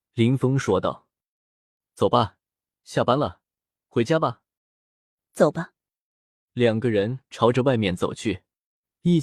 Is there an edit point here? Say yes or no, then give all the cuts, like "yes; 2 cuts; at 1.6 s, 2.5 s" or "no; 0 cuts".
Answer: yes; 1 cut; at 4.6 s